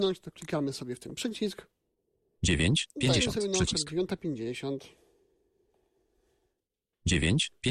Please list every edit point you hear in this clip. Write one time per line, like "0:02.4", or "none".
none